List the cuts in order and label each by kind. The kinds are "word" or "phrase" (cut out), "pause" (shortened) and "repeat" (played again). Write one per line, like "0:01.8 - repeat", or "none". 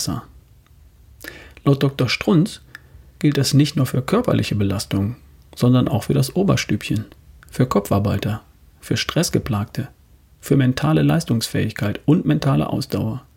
none